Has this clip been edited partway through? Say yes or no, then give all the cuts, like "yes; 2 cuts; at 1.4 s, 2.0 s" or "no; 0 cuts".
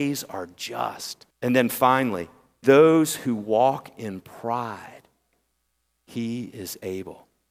yes; 2 cuts; at 1.3 s, 2.6 s